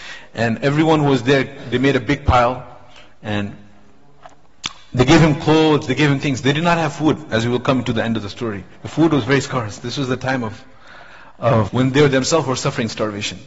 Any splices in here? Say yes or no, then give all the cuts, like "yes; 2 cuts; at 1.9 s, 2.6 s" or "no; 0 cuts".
yes; 1 cut; at 11.7 s